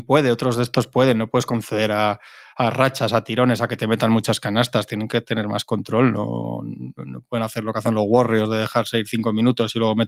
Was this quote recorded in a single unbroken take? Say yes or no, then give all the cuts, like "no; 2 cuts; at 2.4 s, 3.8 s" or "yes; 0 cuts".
yes; 0 cuts